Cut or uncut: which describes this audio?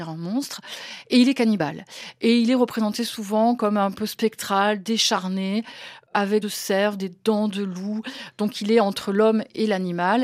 cut